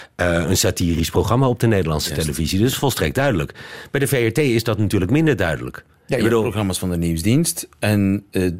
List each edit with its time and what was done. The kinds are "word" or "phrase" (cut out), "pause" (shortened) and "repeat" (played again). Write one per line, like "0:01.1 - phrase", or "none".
0:06.0 - pause